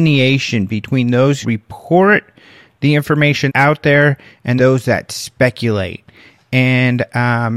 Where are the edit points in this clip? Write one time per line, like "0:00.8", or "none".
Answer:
0:01.4
0:03.5
0:04.6